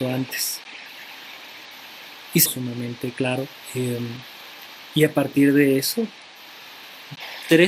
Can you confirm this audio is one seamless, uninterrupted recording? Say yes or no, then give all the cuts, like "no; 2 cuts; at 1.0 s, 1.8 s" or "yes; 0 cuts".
no; 1 cut; at 2.5 s